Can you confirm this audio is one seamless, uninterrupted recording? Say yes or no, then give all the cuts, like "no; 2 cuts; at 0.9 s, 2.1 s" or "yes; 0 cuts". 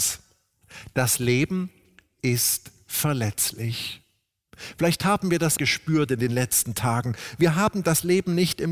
no; 1 cut; at 5.6 s